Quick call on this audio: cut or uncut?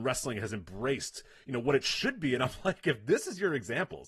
uncut